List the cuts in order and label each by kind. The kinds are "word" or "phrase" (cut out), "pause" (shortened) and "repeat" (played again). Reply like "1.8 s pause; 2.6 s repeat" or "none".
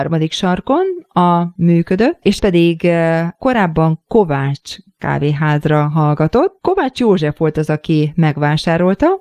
1.6 s word; 2.4 s word